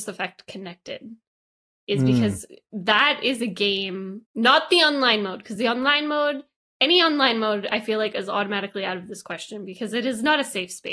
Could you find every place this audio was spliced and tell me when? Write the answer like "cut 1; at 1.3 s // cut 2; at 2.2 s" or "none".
cut 1; at 4.2 s